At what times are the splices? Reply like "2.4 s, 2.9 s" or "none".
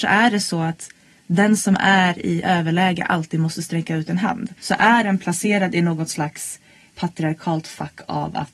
4.6 s